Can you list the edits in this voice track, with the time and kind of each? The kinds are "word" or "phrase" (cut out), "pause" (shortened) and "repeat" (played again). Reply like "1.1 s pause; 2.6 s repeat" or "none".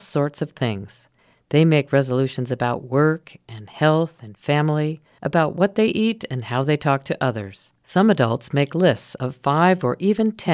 7.8 s pause